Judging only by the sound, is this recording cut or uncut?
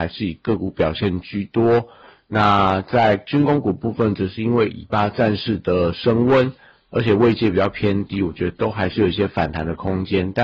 uncut